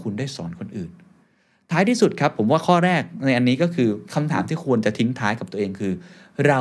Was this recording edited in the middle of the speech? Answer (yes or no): no